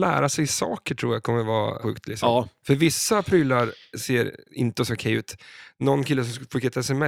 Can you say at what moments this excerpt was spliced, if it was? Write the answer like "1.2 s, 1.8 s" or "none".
1.8 s